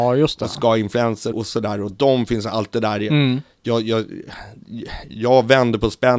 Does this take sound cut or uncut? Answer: cut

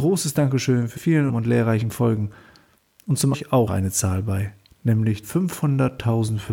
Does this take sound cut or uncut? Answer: cut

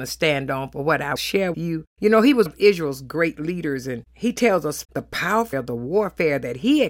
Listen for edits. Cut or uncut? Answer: cut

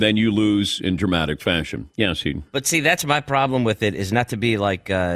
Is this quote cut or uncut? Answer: uncut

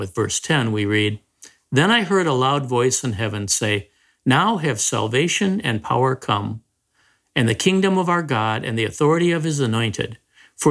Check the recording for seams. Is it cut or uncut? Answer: uncut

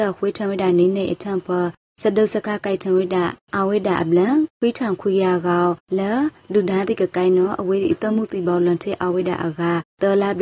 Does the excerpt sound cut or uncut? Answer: uncut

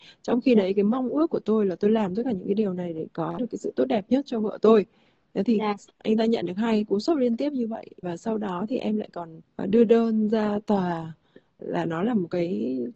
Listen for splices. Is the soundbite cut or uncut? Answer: uncut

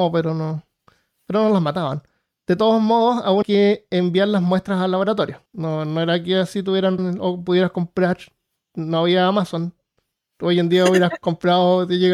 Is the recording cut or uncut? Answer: cut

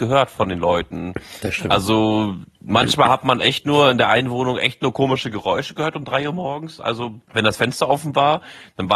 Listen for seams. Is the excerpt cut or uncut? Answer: cut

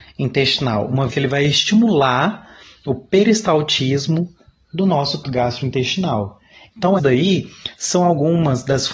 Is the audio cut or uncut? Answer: cut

